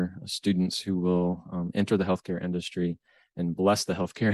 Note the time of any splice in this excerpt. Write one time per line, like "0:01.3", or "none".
none